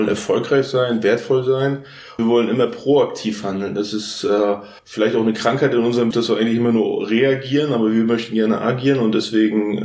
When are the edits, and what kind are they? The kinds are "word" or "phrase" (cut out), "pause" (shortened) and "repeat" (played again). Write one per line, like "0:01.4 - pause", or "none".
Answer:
0:02.2 - word
0:04.8 - pause
0:06.1 - word